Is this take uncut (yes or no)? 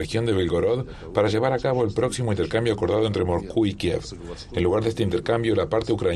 yes